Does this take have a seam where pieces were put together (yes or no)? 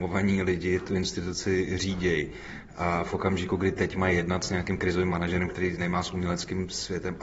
no